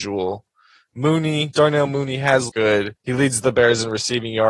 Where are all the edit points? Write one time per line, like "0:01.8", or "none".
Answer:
0:02.5
0:03.0